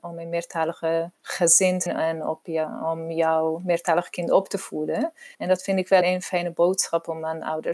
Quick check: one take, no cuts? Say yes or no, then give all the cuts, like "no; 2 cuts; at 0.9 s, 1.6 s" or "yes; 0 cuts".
no; 4 cuts; at 1.1 s, 1.9 s, 5.3 s, 6.0 s